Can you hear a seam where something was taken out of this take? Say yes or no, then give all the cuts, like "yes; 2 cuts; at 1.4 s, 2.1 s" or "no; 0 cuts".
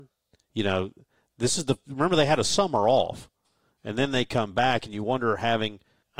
no; 0 cuts